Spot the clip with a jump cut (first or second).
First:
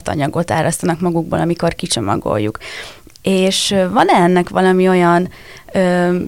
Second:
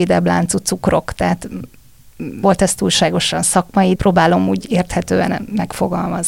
second